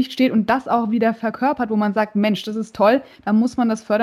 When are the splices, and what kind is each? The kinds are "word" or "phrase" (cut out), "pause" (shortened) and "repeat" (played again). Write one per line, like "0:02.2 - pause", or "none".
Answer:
none

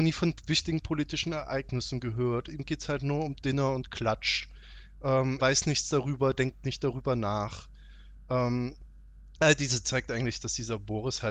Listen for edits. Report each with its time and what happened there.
0:05.4 - word
0:09.8 - word

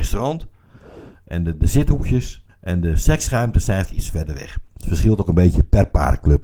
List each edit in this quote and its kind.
0:02.5 - pause
0:03.8 - word

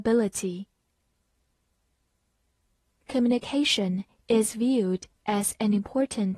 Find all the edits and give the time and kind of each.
none

